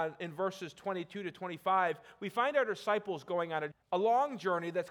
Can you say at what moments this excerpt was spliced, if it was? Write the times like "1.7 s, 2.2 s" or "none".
3.7 s